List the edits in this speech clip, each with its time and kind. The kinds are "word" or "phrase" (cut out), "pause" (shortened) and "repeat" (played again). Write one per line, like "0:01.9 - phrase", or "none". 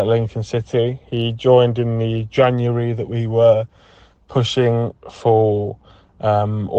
none

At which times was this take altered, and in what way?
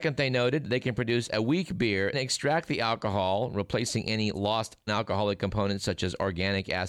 0:02.1 - word
0:04.9 - word

